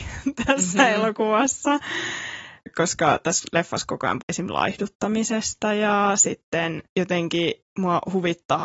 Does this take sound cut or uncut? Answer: cut